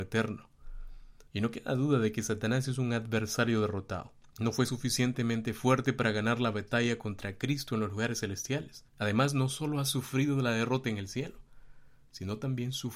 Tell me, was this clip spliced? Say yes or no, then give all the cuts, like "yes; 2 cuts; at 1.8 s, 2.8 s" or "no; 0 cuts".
yes; 3 cuts; at 1.3 s, 4.3 s, 8.9 s